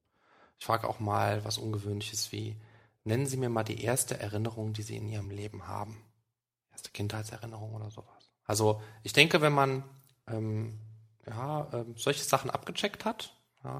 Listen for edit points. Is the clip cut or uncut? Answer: uncut